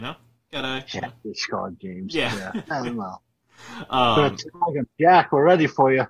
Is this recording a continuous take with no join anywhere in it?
yes; 0 cuts

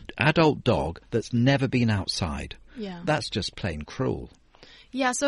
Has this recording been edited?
yes; 1 cut; at 1.0 s

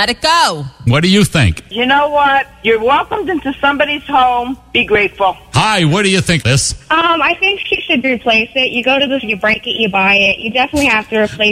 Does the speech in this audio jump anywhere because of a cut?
yes; 3 cuts; at 6.4 s, 8.0 s, 9.2 s

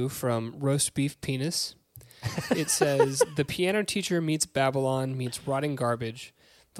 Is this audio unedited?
yes; 0 cuts

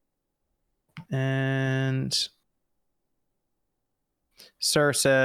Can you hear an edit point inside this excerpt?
yes; 1 cut; at 1.1 s

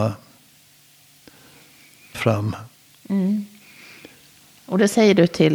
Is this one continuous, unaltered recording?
no; 1 cut; at 2.1 s

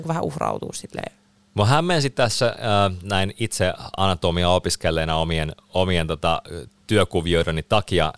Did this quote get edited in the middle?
no; 0 cuts

